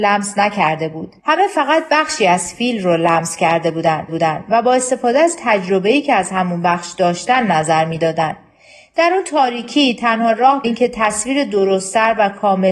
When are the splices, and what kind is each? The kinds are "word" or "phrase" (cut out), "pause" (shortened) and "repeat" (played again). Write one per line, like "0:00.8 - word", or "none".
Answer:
0:01.2 - pause
0:04.1 - repeat
0:10.6 - word